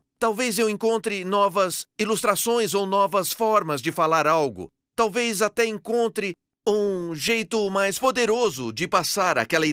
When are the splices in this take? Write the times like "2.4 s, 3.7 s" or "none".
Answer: none